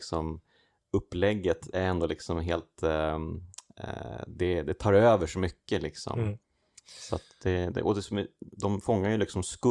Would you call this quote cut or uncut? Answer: uncut